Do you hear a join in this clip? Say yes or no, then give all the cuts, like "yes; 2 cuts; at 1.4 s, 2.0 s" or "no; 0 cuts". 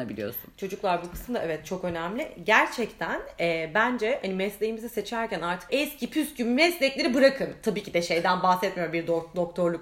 yes; 1 cut; at 5.7 s